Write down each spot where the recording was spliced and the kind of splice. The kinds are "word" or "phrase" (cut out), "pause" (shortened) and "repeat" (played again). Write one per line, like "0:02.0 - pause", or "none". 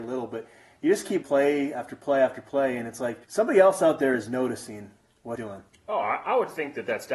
0:01.2 - phrase
0:03.2 - pause
0:05.4 - phrase